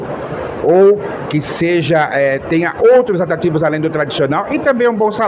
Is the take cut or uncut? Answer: uncut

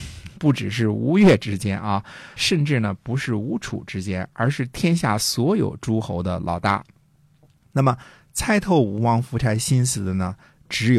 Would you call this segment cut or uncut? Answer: cut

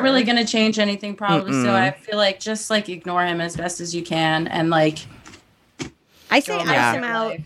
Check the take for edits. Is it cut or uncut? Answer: uncut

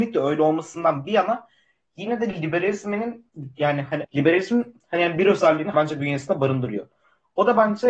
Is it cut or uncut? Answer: cut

